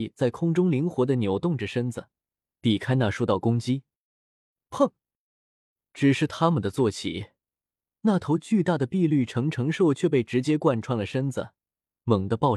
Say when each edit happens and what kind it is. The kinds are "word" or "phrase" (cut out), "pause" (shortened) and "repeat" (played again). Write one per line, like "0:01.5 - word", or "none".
none